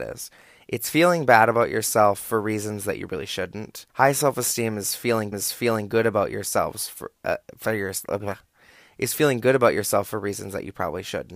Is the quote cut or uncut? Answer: cut